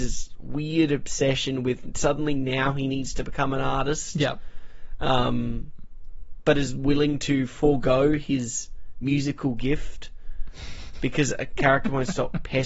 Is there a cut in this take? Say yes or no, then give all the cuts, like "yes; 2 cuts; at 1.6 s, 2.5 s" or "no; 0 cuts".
no; 0 cuts